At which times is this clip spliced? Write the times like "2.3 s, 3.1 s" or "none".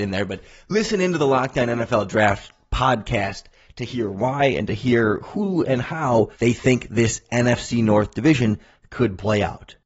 6.3 s